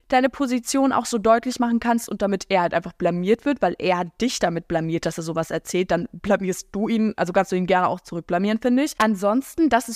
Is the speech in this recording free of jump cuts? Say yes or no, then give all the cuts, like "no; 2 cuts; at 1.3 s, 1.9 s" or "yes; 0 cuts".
yes; 0 cuts